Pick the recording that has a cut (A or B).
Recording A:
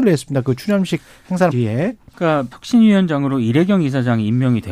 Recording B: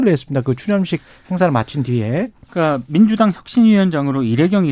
A